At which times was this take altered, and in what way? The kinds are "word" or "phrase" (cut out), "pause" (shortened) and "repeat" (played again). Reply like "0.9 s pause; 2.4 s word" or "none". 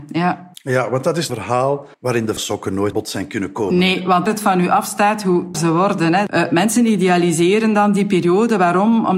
1.3 s phrase; 1.9 s pause; 2.4 s word; 2.9 s word; 4.3 s phrase; 5.5 s word